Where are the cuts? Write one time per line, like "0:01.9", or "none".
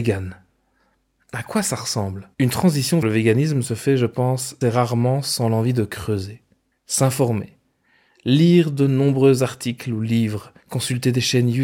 0:02.3
0:03.0
0:04.6
0:06.7
0:10.6

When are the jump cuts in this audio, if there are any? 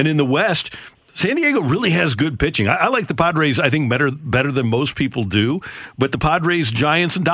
none

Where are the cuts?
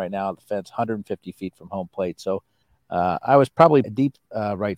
0:02.6
0:03.8

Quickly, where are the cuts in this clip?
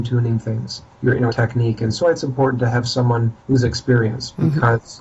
0:00.9
0:01.3
0:02.0
0:03.4

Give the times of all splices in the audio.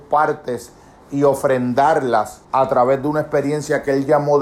0:02.4

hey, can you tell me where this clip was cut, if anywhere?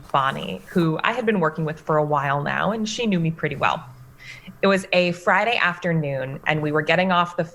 none

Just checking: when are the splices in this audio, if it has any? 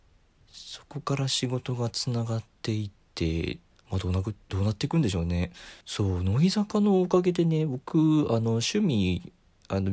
0:03.7
0:05.8

